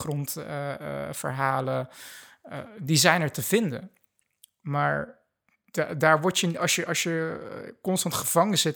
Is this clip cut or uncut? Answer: uncut